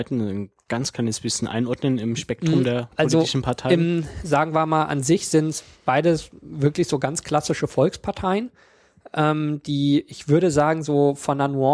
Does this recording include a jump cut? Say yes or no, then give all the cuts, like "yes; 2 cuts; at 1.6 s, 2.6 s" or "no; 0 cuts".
yes; 1 cut; at 6.4 s